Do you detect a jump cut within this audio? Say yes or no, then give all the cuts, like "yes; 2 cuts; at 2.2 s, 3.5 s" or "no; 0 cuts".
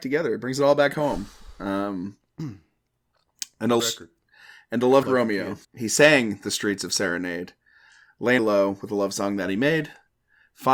yes; 4 cuts; at 3.8 s, 5.0 s, 5.6 s, 8.4 s